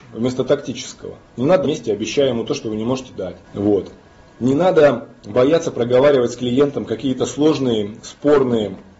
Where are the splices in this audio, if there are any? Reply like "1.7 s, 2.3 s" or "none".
1.6 s, 3.4 s

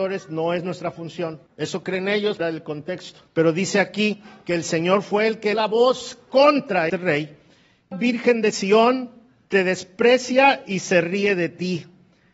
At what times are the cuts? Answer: 1.5 s, 2.4 s, 3.3 s, 5.5 s, 6.9 s, 7.9 s

